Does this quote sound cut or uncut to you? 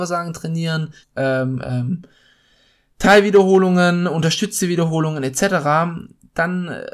cut